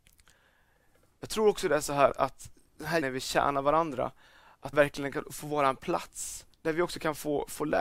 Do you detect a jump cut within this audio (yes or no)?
yes